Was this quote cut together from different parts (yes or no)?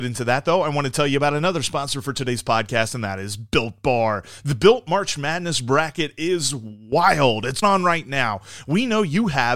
yes